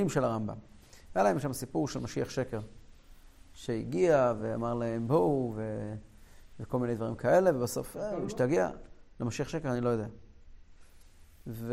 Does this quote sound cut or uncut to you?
uncut